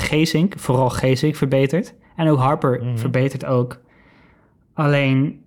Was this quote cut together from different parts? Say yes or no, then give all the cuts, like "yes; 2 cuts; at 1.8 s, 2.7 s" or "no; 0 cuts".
no; 0 cuts